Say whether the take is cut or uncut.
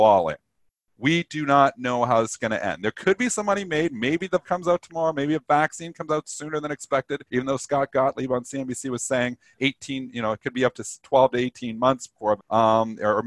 cut